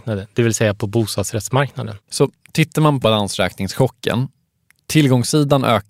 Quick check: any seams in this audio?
yes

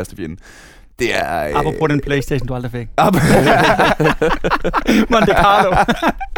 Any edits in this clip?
no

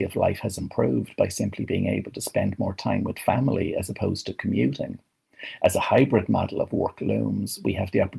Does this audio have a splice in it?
no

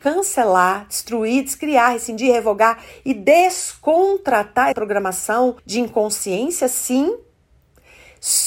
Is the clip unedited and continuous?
no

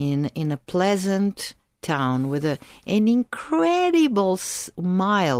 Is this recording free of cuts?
yes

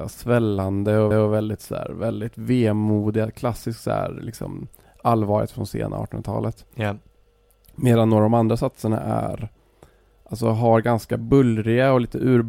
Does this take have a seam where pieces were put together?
yes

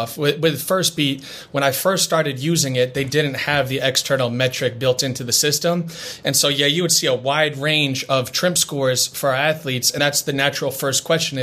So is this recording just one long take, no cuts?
no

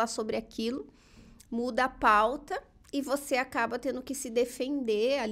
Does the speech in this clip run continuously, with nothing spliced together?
yes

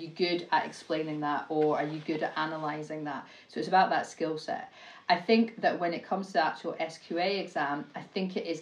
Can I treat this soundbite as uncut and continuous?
yes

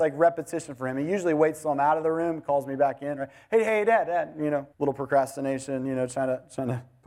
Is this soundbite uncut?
no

